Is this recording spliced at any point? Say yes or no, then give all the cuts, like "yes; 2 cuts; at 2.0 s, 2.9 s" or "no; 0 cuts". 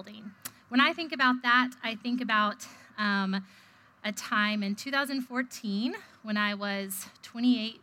no; 0 cuts